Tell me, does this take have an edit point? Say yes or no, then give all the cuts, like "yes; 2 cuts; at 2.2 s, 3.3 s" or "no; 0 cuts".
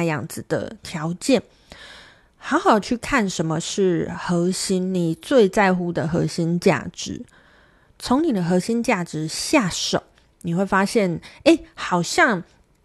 no; 0 cuts